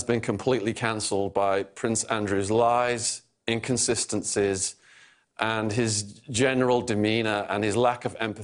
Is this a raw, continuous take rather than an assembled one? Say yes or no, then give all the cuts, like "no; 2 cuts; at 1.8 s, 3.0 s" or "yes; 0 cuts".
yes; 0 cuts